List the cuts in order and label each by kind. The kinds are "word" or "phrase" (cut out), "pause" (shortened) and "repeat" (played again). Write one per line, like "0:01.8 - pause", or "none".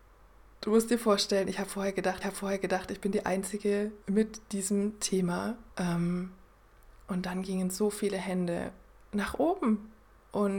0:02.2 - repeat
0:04.0 - pause
0:05.7 - pause